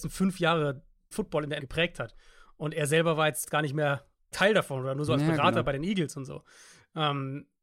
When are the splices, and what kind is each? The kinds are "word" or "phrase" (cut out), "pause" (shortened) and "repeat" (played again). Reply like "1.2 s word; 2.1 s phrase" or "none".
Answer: 1.1 s word; 1.6 s word; 3.4 s word; 4.3 s word